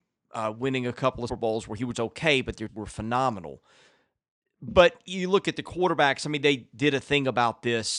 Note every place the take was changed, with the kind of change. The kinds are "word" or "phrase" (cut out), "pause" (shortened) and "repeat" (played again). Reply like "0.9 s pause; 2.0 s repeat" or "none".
1.3 s word; 1.9 s word; 2.7 s word